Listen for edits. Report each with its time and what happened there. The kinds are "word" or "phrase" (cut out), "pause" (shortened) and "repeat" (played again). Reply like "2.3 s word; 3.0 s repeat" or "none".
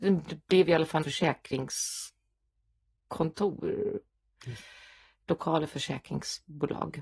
1.0 s word; 5.7 s word